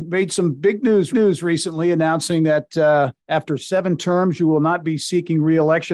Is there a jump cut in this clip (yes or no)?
yes